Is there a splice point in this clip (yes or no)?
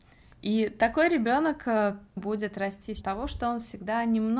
yes